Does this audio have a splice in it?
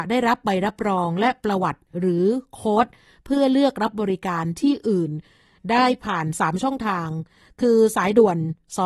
no; 0 cuts

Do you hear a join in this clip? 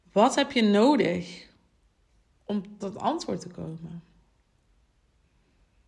yes; 1 cut; at 2.8 s

